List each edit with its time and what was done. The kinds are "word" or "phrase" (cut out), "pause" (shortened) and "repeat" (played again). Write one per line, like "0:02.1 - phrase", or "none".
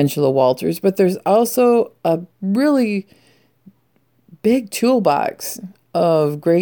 0:02.3 - pause